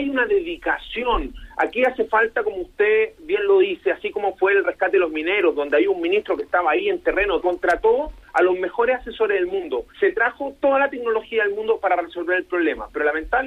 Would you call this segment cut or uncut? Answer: cut